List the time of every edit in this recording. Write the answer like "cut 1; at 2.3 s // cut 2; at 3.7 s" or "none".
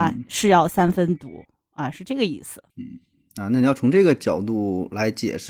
cut 1; at 2.7 s

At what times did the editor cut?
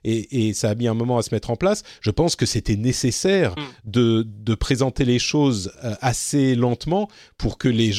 none

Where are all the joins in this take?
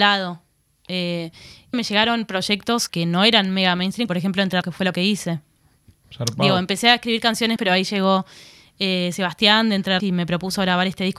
cut 1; at 1.7 s // cut 2; at 2.9 s // cut 3; at 4.1 s // cut 4; at 4.6 s // cut 5; at 4.9 s // cut 6; at 7.6 s // cut 7; at 10.0 s

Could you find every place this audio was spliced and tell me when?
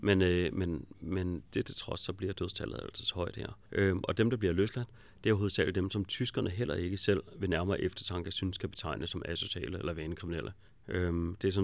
cut 1; at 3.7 s // cut 2; at 10.7 s

